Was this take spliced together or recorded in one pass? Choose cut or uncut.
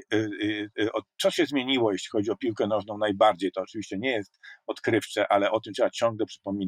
uncut